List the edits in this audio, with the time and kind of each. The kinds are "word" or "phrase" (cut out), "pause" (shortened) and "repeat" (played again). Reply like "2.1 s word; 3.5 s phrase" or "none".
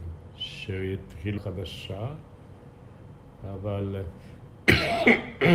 1.4 s phrase